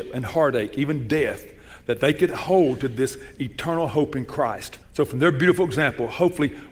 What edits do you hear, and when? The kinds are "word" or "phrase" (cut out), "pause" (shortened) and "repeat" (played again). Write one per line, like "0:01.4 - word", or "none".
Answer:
0:04.8 - pause